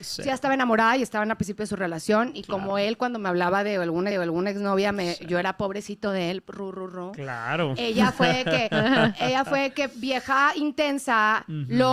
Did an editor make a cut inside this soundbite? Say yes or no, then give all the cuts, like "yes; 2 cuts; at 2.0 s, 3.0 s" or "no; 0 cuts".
yes; 1 cut; at 4.1 s